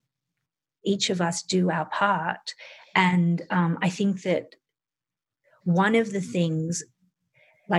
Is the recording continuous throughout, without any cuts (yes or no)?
yes